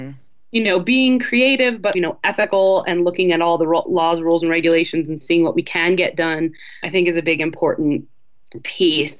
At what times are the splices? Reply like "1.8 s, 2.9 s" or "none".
1.9 s, 6.8 s